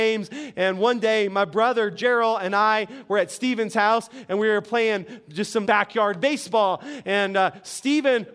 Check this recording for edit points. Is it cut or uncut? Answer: cut